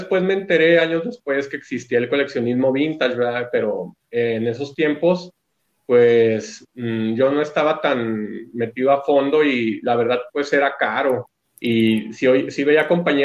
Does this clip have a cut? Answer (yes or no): yes